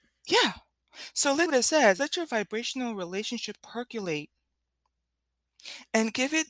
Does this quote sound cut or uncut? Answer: cut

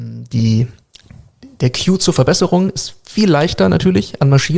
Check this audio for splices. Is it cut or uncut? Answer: uncut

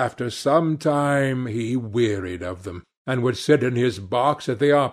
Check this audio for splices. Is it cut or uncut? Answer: uncut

